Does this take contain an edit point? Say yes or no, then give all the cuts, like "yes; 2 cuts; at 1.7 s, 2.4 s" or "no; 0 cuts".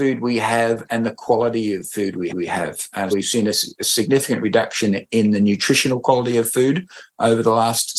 yes; 2 cuts; at 2.3 s, 3.1 s